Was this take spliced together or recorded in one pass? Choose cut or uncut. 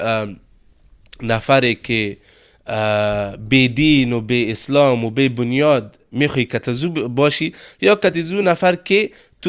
uncut